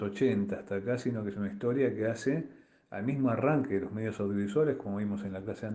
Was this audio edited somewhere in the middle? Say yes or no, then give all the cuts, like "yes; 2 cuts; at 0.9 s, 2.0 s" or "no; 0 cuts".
no; 0 cuts